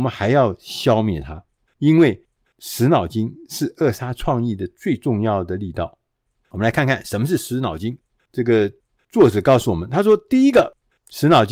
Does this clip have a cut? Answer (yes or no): no